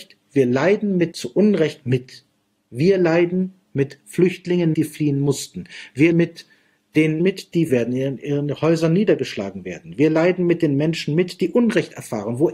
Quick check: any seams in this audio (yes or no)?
yes